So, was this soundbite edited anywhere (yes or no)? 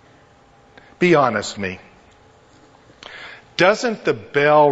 yes